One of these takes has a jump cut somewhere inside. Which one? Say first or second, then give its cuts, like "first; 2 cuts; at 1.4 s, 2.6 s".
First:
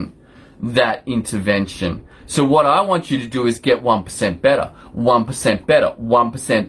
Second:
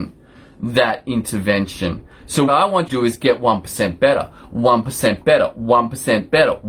second; 2 cuts; at 2.5 s, 2.9 s